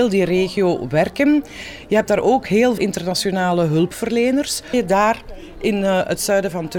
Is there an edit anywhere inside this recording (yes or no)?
yes